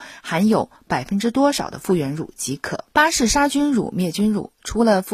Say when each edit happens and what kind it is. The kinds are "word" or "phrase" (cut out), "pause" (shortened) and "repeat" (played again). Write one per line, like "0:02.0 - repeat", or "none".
0:02.9 - pause